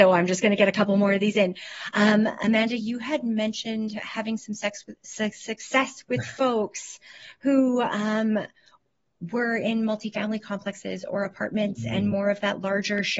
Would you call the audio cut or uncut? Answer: uncut